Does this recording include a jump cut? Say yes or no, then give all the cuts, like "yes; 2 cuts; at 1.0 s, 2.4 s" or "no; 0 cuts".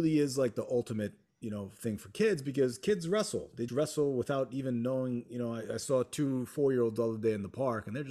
yes; 1 cut; at 3.7 s